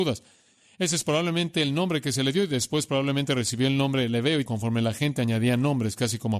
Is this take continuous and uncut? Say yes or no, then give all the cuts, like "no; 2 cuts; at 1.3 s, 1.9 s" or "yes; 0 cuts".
no; 1 cut; at 4.5 s